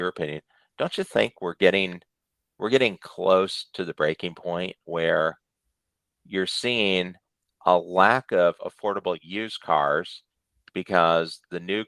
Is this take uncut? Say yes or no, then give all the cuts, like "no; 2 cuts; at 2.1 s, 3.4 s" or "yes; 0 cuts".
yes; 0 cuts